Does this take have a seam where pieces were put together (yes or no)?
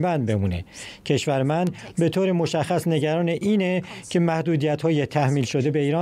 no